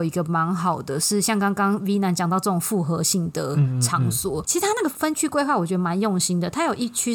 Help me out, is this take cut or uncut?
uncut